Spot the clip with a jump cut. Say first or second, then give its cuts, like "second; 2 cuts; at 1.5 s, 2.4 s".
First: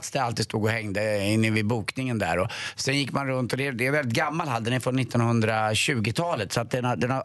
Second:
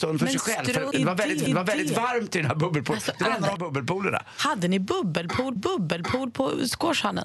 second; 4 cuts; at 0.9 s, 1.5 s, 3.6 s, 5.6 s